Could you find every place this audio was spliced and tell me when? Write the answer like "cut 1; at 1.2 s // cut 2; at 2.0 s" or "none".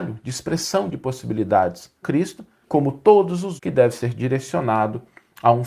cut 1; at 2.0 s // cut 2; at 2.6 s // cut 3; at 3.6 s